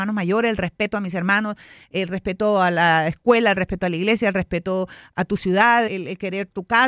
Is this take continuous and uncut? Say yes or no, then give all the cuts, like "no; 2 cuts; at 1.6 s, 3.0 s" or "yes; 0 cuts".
no; 1 cut; at 5.9 s